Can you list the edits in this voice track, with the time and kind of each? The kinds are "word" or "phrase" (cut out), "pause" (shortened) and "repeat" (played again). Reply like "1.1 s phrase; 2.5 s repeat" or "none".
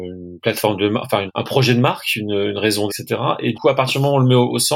1.3 s word; 2.9 s word; 3.5 s word